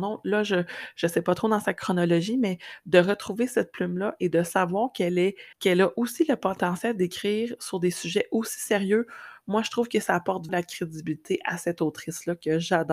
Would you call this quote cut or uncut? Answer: cut